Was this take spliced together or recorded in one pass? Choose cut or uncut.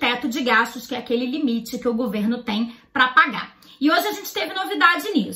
uncut